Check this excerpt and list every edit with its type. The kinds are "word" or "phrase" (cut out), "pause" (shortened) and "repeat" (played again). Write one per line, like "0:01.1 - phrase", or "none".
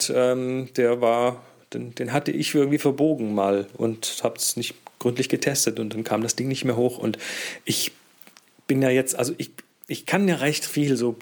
none